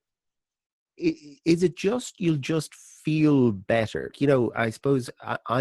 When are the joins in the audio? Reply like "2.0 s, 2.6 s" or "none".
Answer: 4.1 s